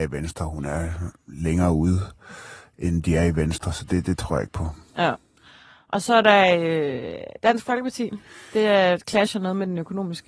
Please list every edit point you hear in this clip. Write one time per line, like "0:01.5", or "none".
none